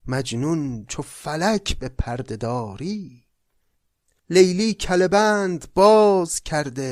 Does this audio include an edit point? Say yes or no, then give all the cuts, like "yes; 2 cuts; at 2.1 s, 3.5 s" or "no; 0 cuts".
no; 0 cuts